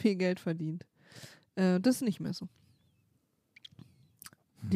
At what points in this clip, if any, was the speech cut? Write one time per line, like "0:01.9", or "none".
none